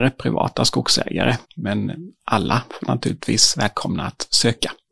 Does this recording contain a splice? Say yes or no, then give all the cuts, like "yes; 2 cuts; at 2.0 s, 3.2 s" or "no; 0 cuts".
yes; 1 cut; at 1.4 s